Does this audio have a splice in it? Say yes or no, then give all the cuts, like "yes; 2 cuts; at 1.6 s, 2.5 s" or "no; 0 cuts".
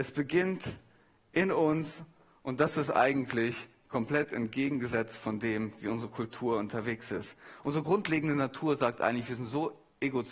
no; 0 cuts